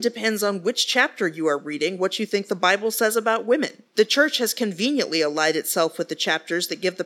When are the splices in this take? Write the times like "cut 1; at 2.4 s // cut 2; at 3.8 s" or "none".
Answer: cut 1; at 3.9 s